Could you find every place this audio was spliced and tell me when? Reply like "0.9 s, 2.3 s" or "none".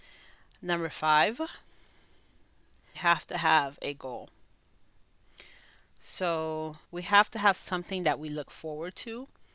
2.9 s, 6.8 s